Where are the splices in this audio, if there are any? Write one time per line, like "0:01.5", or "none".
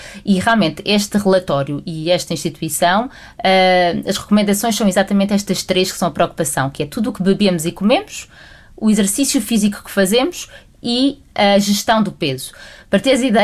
none

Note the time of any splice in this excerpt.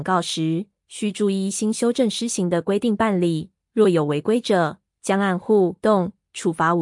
0:05.8

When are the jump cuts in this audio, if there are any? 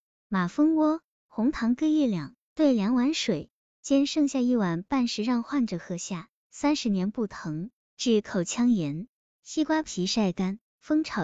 none

